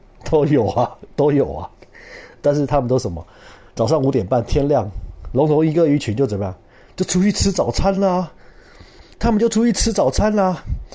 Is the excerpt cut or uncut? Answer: uncut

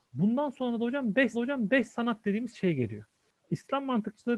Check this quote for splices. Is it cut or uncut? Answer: cut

